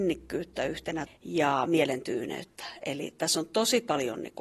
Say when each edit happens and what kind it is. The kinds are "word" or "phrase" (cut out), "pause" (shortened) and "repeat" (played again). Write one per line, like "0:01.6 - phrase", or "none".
0:01.1 - word